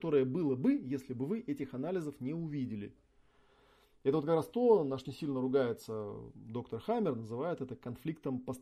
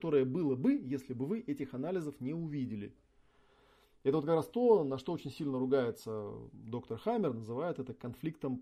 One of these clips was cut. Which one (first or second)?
first